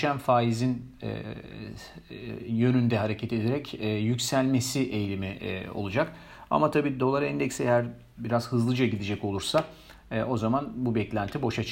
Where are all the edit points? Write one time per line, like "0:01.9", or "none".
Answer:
none